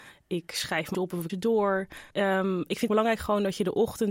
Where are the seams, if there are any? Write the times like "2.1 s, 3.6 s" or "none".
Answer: 0.9 s, 1.3 s, 2.1 s, 2.9 s